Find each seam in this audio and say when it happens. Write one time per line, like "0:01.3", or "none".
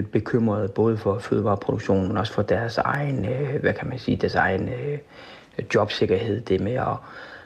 none